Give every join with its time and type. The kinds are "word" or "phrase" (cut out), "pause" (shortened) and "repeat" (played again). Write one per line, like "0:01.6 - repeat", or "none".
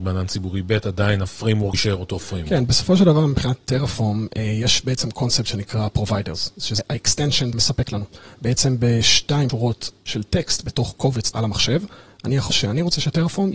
0:01.7 - word
0:05.5 - word
0:06.8 - word
0:07.5 - word
0:09.5 - word
0:11.3 - word
0:12.5 - word